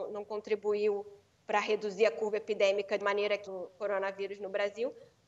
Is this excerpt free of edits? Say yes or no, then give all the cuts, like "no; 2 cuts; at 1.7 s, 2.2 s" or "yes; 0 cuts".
no; 2 cuts; at 3.0 s, 3.5 s